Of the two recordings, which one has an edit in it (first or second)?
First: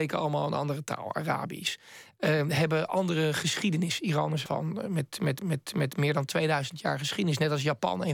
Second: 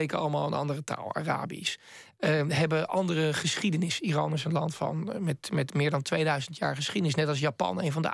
first